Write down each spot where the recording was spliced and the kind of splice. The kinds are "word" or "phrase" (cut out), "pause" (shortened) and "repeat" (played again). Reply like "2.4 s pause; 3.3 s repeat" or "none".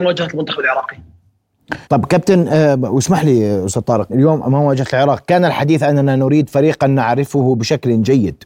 1.8 s pause; 4.1 s word